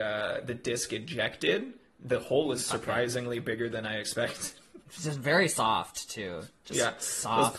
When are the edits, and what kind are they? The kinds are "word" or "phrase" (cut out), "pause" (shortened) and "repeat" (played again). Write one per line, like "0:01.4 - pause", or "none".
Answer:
0:04.8 - pause